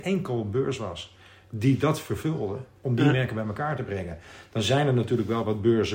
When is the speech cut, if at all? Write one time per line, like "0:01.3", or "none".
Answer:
none